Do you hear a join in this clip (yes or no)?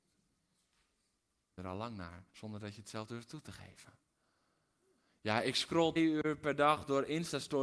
yes